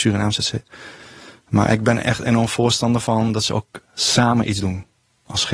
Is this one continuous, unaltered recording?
yes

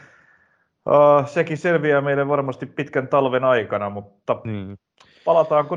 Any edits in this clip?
no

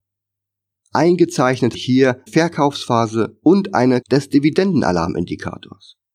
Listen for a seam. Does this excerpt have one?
yes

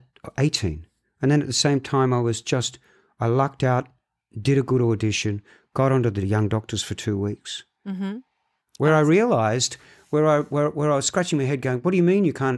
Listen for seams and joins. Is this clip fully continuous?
yes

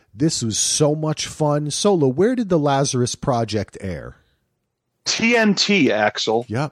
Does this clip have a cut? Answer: no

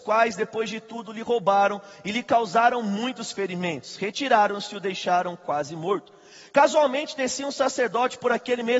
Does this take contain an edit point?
no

